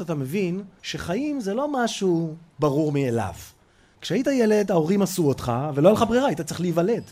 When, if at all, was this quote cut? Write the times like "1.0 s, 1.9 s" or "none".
none